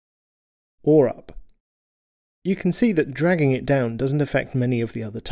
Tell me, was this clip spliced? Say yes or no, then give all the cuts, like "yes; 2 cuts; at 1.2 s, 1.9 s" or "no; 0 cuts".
no; 0 cuts